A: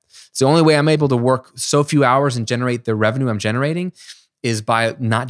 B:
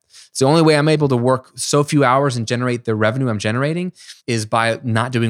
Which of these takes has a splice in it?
B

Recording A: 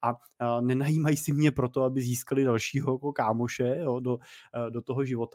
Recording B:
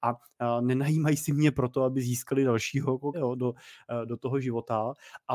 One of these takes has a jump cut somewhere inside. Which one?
B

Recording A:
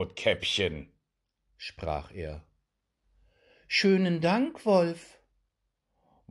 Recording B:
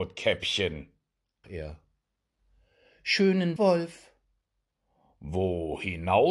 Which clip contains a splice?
B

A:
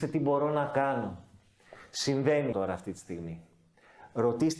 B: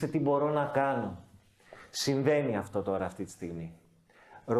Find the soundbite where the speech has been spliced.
A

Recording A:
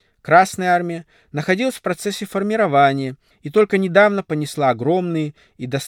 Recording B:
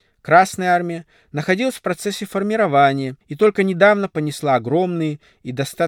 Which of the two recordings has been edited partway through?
B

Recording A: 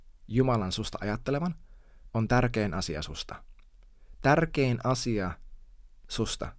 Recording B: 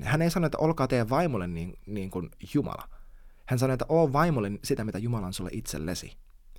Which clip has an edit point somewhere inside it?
B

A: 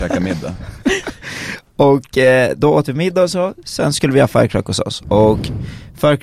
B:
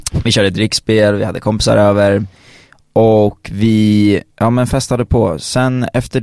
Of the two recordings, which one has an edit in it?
B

